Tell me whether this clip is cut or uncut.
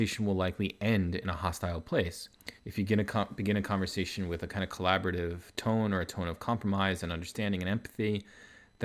cut